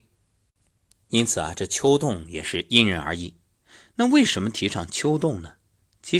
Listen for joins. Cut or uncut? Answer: uncut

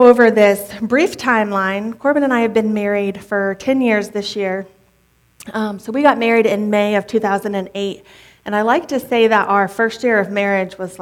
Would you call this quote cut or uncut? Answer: uncut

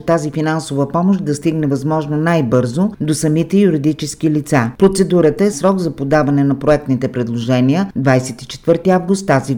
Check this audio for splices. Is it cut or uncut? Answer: cut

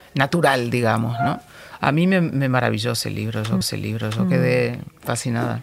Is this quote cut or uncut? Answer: cut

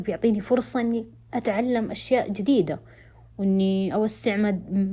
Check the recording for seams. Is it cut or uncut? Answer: uncut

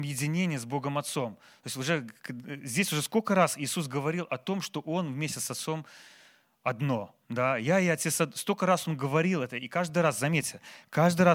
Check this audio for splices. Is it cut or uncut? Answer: uncut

